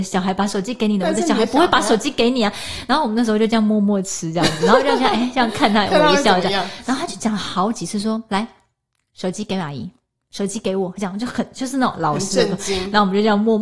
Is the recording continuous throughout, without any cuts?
yes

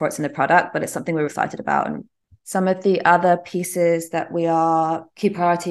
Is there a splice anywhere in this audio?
yes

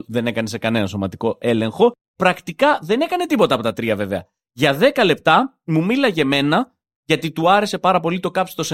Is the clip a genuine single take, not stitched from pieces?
yes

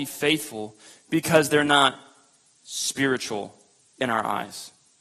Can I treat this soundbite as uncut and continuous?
yes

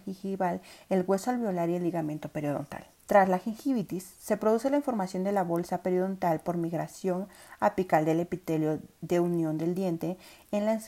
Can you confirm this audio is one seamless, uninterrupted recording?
no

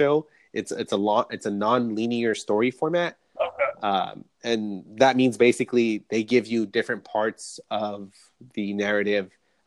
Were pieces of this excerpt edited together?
no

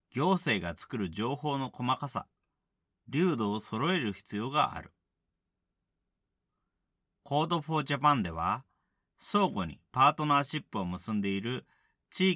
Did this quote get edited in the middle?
no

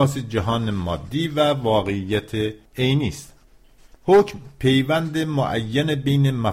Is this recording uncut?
yes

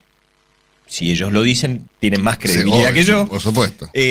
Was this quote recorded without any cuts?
no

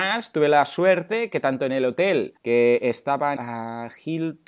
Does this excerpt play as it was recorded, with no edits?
no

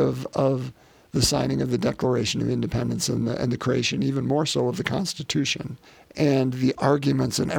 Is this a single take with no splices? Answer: no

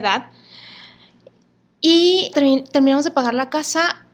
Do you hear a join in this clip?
yes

